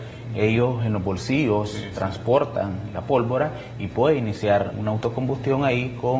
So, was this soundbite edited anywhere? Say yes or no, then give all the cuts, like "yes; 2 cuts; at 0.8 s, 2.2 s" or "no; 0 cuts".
yes; 1 cut; at 4.7 s